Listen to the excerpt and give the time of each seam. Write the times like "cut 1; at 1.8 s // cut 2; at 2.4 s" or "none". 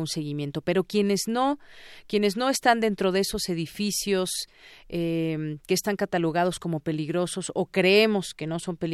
none

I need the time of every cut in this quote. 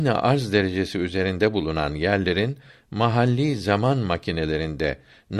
none

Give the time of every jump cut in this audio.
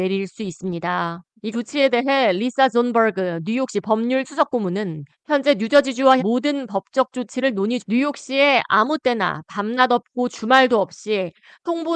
cut 1; at 1.5 s // cut 2; at 4.2 s // cut 3; at 6.2 s // cut 4; at 7.8 s

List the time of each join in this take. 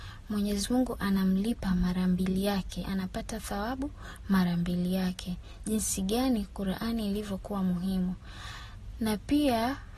cut 1; at 2.8 s

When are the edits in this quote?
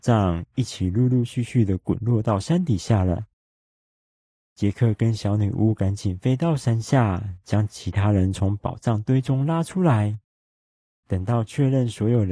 none

